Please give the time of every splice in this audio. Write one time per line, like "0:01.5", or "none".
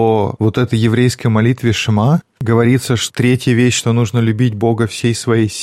none